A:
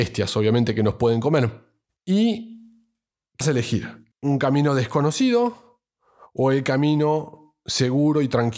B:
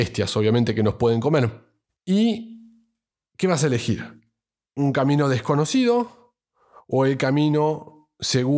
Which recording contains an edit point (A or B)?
A